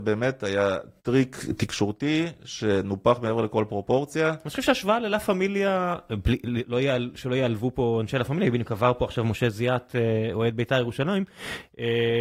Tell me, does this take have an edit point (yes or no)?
yes